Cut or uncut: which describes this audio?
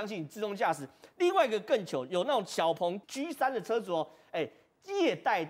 cut